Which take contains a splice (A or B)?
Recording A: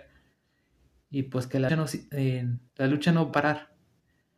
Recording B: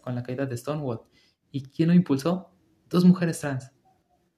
A